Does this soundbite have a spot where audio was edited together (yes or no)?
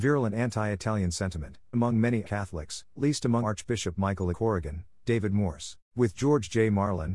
yes